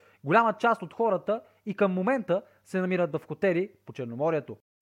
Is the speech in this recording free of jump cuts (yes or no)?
yes